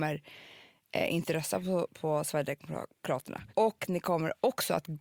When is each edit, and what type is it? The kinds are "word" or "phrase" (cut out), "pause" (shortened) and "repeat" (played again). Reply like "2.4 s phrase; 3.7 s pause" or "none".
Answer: 3.5 s pause